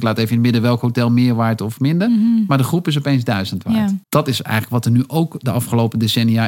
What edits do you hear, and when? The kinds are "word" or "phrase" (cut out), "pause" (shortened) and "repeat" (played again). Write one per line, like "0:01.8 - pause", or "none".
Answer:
0:04.0 - pause